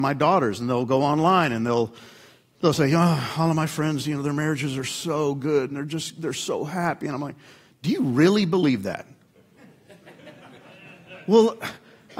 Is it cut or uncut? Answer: uncut